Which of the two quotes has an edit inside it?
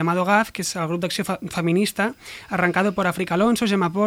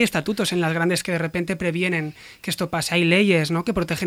second; 1 cut; at 1.0 s

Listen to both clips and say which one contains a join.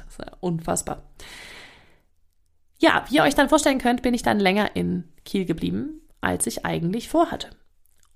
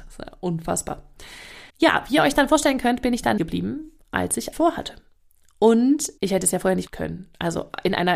second; 5 cuts; at 1.7 s, 3.4 s, 4.5 s, 6.2 s, 6.9 s

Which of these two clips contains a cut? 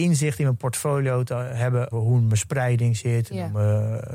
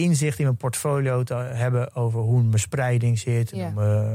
first; 1 cut; at 1.9 s

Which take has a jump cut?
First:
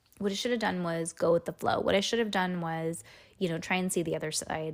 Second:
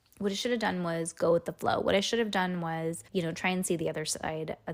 second; 1 cut; at 3.1 s

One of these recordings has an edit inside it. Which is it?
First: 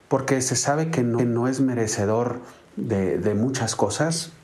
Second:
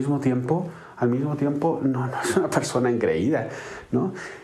first; 1 cut; at 1.2 s

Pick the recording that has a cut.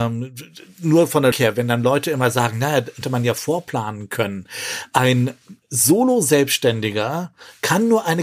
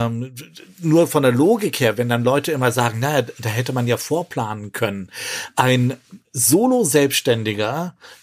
first; 2 cuts; at 1.3 s, 3.0 s

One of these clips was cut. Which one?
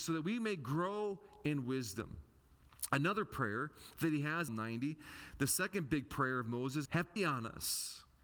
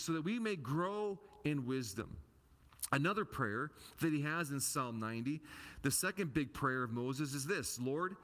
first; 3 cuts; at 4.5 s, 6.9 s, 7.2 s

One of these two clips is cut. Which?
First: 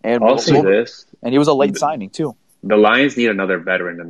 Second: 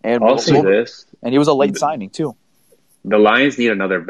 first; 1 cut; at 2.5 s

